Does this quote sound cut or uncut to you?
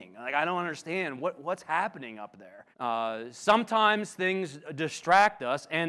cut